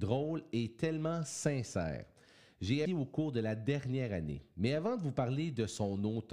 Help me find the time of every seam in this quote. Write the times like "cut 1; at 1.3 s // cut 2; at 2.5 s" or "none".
cut 1; at 2.9 s